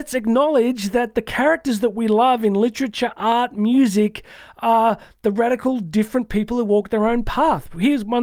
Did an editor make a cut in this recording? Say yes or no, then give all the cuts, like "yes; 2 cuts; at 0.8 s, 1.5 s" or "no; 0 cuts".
no; 0 cuts